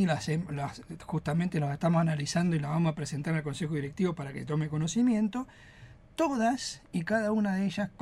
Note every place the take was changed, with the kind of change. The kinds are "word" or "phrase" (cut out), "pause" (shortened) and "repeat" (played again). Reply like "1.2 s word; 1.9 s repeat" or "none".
none